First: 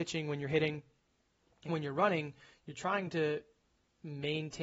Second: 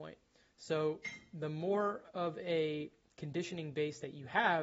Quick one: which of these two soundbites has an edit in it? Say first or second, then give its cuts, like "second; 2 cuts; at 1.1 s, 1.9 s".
first; 1 cut; at 1.7 s